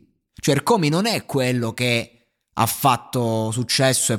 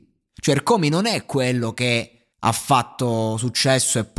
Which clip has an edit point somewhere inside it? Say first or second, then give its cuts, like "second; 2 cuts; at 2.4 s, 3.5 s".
second; 1 cut; at 2.3 s